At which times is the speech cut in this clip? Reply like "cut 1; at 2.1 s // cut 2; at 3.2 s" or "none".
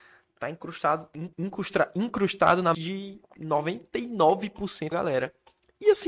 cut 1; at 1.3 s // cut 2; at 2.7 s // cut 3; at 4.9 s